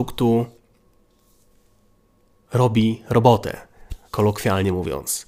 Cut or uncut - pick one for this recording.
cut